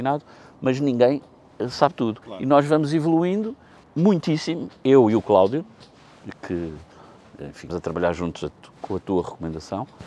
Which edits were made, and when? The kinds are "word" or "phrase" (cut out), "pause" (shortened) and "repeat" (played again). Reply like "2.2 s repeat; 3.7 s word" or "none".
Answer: 2.2 s pause; 3.8 s word; 7.7 s word